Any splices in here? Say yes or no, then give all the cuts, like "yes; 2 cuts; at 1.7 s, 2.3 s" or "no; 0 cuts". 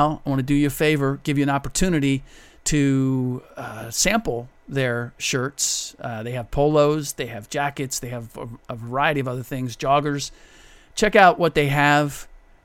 no; 0 cuts